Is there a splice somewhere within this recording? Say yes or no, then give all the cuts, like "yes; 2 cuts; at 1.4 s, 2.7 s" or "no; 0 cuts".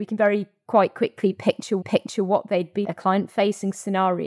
yes; 2 cuts; at 1.8 s, 2.8 s